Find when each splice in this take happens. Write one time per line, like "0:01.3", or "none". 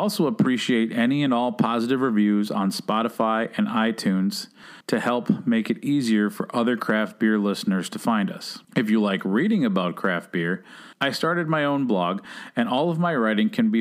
0:04.8
0:08.6
0:10.9